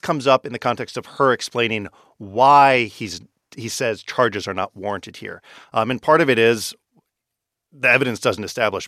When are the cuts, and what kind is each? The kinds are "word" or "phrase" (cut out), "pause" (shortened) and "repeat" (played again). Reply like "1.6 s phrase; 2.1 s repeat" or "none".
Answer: none